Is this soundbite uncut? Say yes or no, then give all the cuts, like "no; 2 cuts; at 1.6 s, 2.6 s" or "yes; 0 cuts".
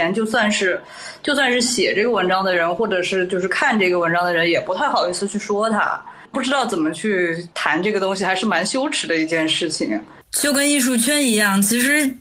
no; 2 cuts; at 7.5 s, 10.2 s